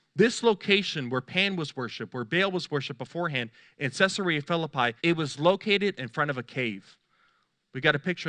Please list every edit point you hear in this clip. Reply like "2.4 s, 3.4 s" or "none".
5.0 s